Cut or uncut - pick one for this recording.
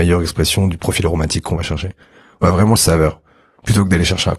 cut